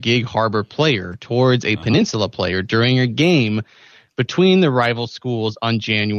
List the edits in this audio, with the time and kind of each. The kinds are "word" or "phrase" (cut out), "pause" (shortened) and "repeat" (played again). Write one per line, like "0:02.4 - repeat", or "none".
none